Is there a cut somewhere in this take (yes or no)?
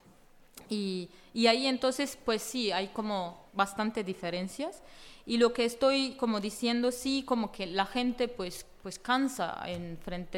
yes